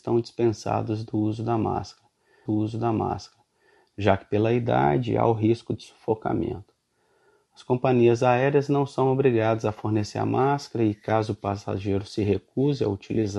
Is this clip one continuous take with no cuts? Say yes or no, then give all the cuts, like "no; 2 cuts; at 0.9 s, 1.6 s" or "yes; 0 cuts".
no; 1 cut; at 2.5 s